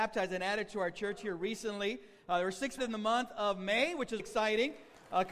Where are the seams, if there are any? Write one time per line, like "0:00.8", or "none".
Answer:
0:02.8
0:04.2